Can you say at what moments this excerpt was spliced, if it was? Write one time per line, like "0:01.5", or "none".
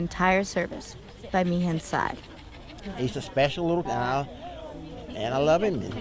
0:01.3
0:03.1
0:03.8